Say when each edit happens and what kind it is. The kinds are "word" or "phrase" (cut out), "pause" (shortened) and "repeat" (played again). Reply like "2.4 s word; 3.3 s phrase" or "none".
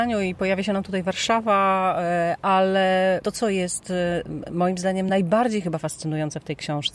none